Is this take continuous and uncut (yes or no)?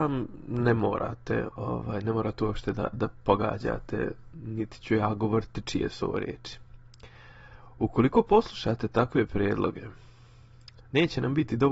yes